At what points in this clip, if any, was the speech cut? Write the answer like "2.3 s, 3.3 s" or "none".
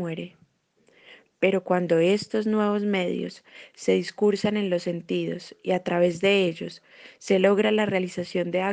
none